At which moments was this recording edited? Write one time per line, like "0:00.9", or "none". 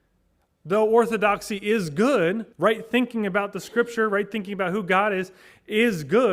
0:02.5